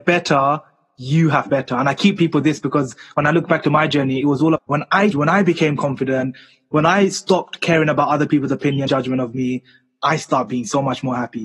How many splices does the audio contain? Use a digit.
5